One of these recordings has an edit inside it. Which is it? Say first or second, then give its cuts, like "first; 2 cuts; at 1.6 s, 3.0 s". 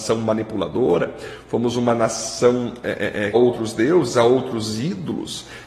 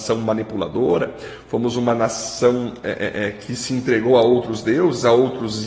first; 1 cut; at 3.3 s